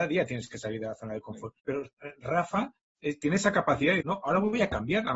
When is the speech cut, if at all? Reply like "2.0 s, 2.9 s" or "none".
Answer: 1.6 s, 4.0 s